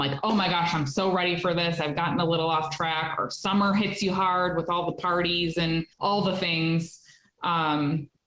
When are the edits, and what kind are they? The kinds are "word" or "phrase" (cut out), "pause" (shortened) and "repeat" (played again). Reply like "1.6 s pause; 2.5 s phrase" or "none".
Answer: 5.9 s pause